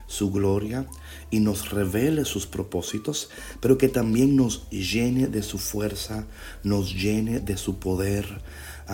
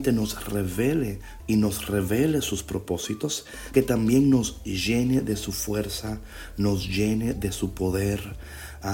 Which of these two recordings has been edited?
second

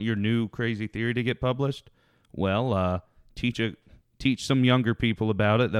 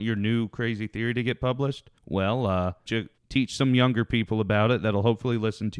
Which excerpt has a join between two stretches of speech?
second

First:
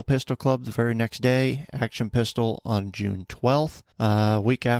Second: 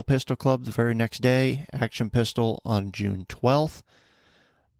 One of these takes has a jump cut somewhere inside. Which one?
first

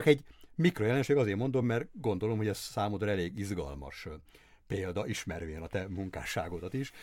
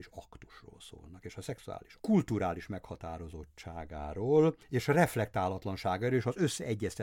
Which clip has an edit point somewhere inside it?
second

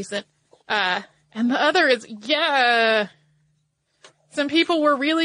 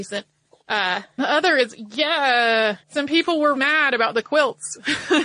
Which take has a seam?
second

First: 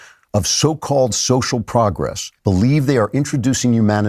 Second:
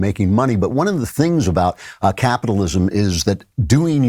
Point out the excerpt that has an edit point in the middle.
first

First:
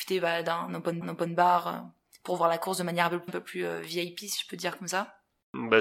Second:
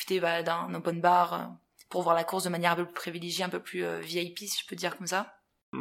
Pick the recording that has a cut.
first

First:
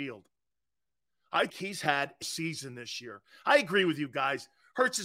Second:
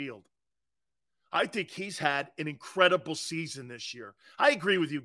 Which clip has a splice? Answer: first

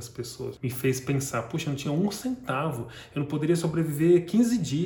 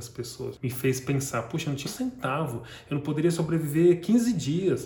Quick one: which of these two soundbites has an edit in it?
second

